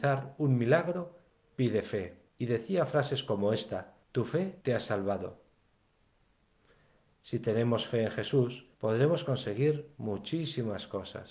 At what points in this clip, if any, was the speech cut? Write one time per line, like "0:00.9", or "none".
0:02.3
0:04.0
0:04.6
0:08.7